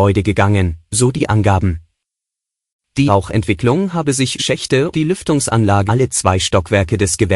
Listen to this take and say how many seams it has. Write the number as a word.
four